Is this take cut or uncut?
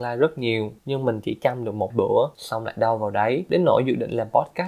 cut